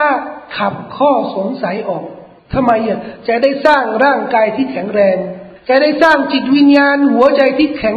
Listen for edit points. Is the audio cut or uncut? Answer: cut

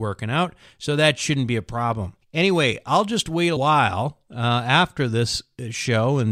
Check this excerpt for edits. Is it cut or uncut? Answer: cut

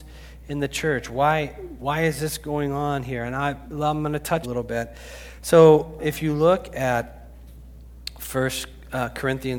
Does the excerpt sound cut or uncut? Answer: cut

